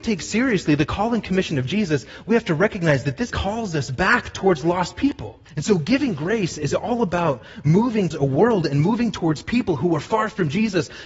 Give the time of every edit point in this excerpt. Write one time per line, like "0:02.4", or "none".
0:03.3
0:05.5
0:08.1